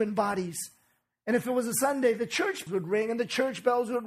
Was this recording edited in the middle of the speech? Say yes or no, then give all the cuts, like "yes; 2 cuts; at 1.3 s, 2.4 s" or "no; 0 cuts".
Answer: yes; 1 cut; at 2.7 s